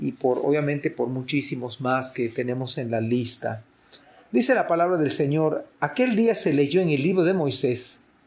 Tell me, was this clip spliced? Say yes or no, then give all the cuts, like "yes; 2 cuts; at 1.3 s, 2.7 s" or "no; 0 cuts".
no; 0 cuts